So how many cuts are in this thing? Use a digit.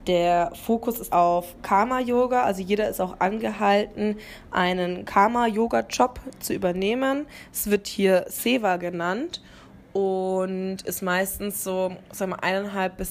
1